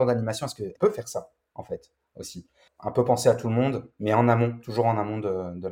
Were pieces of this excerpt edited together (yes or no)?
no